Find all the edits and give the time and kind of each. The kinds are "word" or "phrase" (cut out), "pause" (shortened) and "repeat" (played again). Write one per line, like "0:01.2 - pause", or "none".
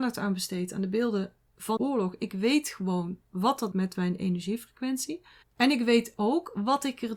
0:01.8 - word
0:03.7 - word
0:05.4 - pause